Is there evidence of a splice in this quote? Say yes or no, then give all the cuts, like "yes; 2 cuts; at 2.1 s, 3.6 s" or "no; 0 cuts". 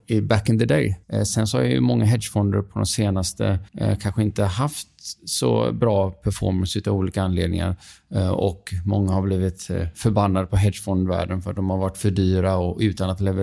yes; 2 cuts; at 1.0 s, 3.7 s